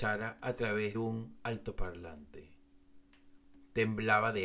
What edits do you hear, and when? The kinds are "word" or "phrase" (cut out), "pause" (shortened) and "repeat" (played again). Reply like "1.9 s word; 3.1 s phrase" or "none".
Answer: 0.9 s word